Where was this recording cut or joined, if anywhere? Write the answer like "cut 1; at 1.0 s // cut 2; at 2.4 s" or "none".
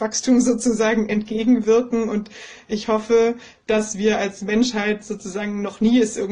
none